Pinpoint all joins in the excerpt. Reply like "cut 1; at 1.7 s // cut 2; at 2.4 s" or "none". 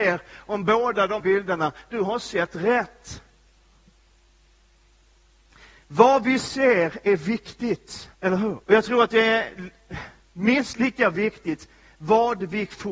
cut 1; at 1.2 s // cut 2; at 8.1 s // cut 3; at 8.6 s